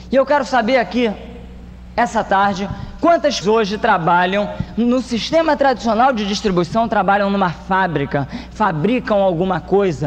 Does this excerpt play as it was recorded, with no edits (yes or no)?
no